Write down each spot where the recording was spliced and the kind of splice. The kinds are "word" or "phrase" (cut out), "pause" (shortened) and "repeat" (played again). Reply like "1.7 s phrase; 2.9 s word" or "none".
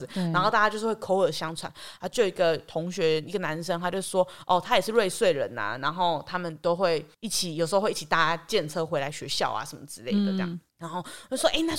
7.1 s pause; 10.7 s pause